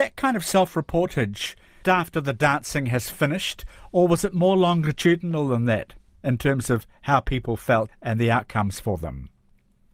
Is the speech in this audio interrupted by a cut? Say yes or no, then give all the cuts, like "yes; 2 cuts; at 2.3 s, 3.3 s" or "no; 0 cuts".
yes; 2 cuts; at 1.8 s, 7.9 s